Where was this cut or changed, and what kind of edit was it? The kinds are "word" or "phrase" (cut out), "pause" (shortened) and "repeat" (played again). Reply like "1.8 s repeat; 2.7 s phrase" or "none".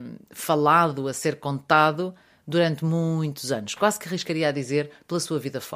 none